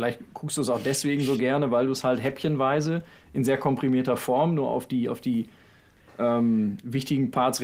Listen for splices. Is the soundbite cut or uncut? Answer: uncut